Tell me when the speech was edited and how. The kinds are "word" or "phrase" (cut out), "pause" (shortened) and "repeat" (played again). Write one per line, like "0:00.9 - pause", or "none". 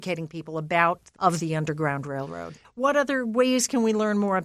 0:01.2 - word